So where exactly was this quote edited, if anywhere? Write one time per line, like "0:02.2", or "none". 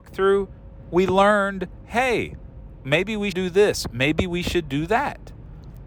0:03.3